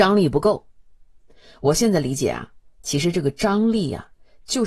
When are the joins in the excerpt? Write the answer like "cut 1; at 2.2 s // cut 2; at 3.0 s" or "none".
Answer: none